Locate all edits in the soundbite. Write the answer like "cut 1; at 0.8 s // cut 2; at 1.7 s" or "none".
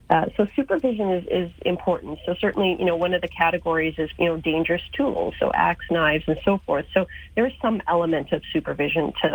cut 1; at 4.2 s